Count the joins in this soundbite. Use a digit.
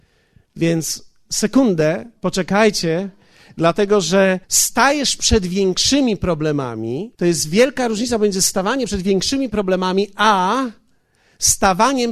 3